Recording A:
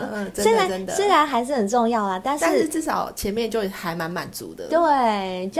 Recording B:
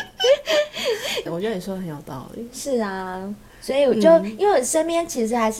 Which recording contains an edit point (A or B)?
B